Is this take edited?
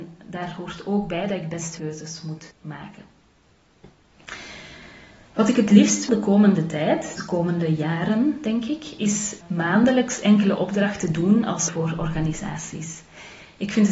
yes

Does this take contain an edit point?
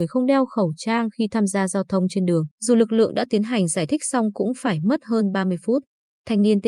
yes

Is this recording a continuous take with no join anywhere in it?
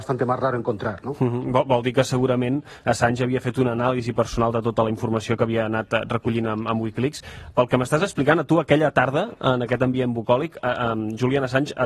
yes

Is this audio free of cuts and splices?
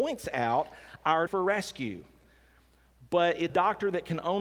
no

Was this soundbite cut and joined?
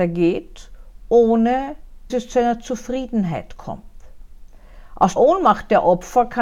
yes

